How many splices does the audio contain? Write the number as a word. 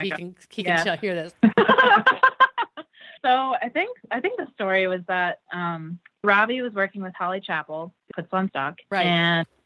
five